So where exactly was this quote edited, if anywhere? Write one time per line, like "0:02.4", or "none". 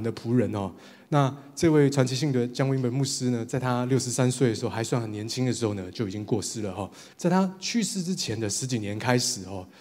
0:07.1